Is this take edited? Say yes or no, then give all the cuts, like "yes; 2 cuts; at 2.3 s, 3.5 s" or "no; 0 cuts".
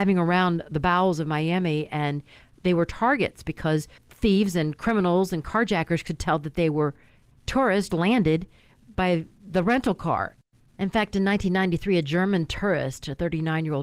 yes; 2 cuts; at 4.0 s, 7.9 s